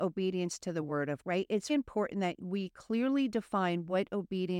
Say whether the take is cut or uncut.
cut